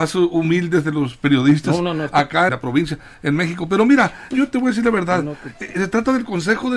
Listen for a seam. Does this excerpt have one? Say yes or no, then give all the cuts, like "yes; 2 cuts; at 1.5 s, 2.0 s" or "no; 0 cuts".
yes; 2 cuts; at 2.5 s, 4.3 s